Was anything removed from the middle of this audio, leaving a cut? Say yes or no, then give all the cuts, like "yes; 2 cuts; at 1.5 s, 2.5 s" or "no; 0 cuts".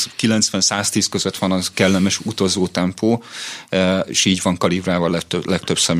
no; 0 cuts